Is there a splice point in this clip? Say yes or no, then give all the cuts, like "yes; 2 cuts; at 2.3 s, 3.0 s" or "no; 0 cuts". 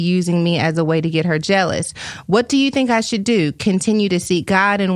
no; 0 cuts